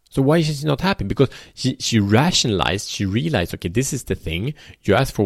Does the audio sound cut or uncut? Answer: uncut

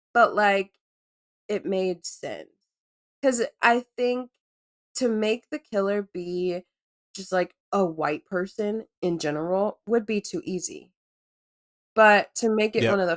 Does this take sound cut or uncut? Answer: uncut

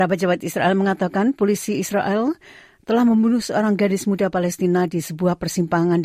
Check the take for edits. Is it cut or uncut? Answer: uncut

